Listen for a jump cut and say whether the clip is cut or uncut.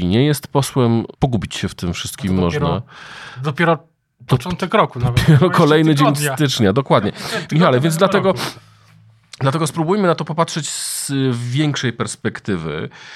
cut